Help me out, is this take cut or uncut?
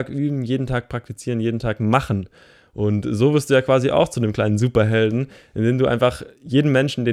uncut